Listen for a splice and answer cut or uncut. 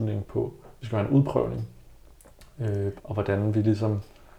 cut